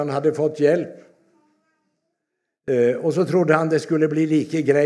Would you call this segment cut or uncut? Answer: uncut